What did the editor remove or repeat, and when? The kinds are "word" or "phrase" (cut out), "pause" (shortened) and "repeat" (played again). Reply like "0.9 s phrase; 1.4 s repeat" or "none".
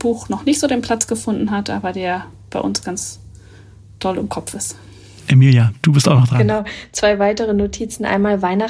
none

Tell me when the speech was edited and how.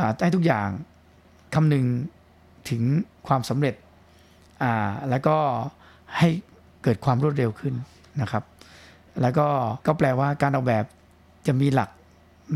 9.8 s pause

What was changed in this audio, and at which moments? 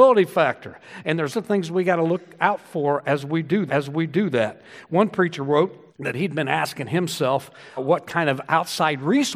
1.3 s word; 3.7 s repeat; 5.9 s pause; 7.8 s word

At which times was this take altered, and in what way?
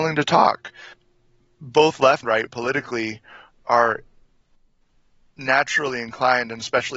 2.2 s word

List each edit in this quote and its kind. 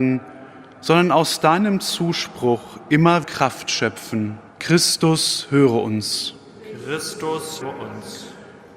3.2 s word; 4.5 s pause; 7.6 s word

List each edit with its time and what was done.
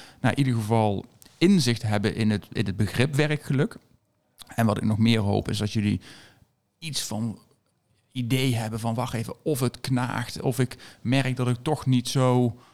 none

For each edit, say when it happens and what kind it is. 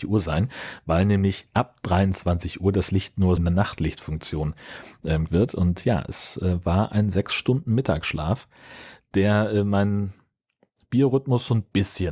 3.4 s word; 5.3 s word

